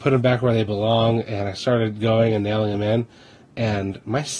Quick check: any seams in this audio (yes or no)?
no